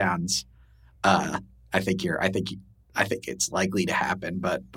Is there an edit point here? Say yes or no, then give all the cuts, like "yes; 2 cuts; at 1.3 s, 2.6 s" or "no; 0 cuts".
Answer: no; 0 cuts